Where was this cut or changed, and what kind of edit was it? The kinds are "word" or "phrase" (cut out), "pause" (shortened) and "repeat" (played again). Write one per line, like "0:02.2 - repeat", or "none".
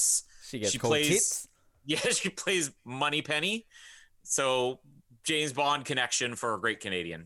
none